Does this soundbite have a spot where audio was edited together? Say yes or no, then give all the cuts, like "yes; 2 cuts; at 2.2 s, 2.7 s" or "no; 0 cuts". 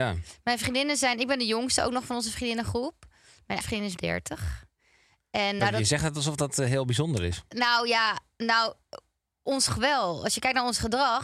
yes; 4 cuts; at 3.6 s, 4.0 s, 5.6 s, 9.7 s